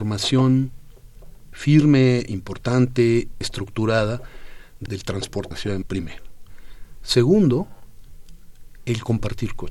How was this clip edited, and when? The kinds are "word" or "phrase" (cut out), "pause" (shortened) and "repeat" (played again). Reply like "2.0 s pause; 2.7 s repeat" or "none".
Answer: 1.5 s word; 3.4 s word; 4.9 s word; 5.5 s word; 5.8 s word